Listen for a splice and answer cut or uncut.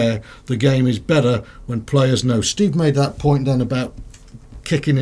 uncut